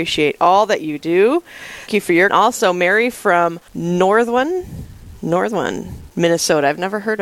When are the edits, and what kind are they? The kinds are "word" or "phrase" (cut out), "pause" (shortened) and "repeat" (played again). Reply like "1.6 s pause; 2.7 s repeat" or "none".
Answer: 1.9 s word; 2.3 s phrase; 3.7 s pause